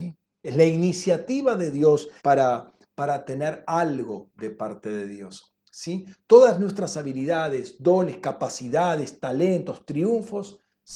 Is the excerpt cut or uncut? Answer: cut